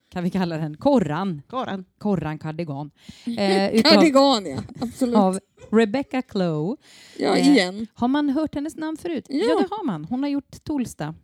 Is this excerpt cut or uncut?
uncut